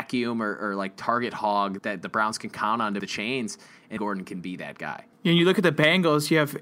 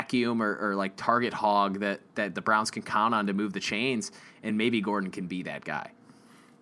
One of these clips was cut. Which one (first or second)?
first